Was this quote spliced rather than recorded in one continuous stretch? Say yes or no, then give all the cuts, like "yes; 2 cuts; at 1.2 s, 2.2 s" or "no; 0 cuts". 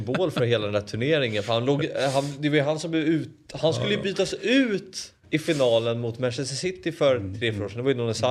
no; 0 cuts